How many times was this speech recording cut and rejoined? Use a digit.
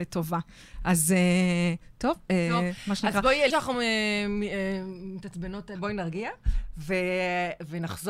2